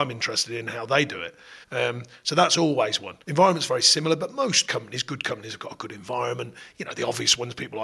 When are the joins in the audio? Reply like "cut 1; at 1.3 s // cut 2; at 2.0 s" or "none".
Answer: cut 1; at 1.6 s // cut 2; at 3.2 s